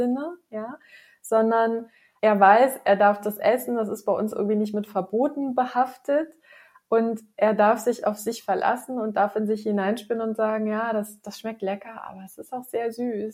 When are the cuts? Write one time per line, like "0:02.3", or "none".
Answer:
none